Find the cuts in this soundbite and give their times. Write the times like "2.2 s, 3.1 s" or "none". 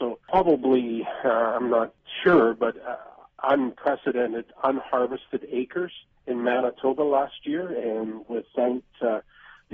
8.2 s